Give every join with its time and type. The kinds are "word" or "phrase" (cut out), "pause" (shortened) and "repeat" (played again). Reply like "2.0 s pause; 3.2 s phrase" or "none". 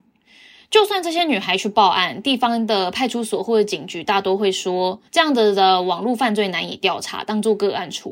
5.1 s pause